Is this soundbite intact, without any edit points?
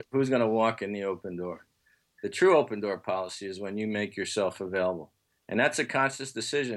yes; 0 cuts

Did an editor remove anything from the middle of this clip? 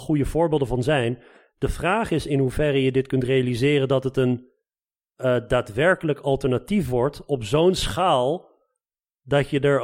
no; 0 cuts

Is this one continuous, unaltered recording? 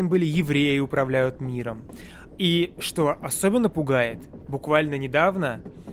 yes; 0 cuts

